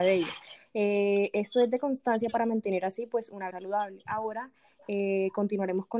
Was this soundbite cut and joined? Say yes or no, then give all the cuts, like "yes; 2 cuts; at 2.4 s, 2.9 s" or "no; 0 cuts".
yes; 1 cut; at 3.5 s